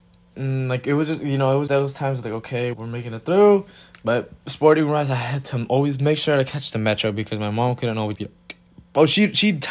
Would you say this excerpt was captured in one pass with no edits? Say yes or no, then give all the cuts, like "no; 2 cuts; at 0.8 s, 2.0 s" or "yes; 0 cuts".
no; 3 cuts; at 1.7 s, 2.7 s, 8.1 s